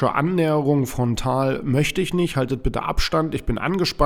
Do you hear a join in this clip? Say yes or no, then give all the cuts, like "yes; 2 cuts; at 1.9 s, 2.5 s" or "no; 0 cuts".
no; 0 cuts